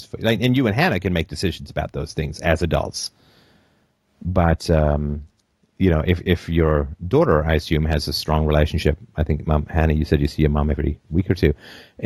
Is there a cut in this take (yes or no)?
no